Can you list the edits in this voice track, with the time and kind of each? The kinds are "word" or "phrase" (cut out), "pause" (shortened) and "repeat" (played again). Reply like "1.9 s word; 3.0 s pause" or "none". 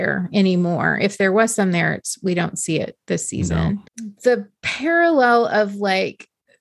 3.9 s pause